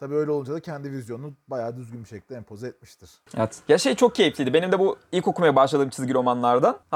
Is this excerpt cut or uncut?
uncut